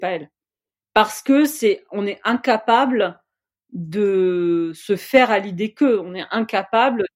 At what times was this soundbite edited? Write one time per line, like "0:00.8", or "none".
none

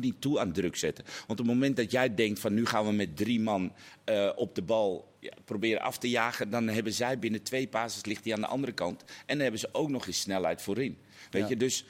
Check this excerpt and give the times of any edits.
0:05.2

